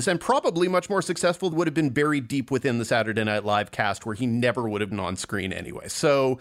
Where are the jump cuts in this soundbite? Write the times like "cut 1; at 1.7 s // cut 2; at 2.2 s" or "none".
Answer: cut 1; at 1.5 s // cut 2; at 4.9 s